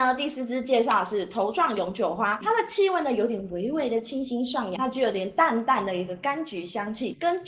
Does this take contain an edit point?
yes; 2 cuts; at 2.4 s, 4.8 s

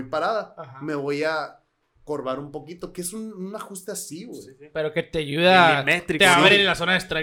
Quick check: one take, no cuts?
yes; 0 cuts

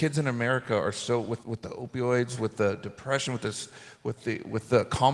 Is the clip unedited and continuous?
no; 1 cut; at 1.4 s

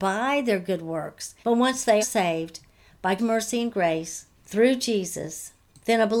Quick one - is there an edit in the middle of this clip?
yes; 4 cuts; at 1.4 s, 2.0 s, 3.2 s, 4.3 s

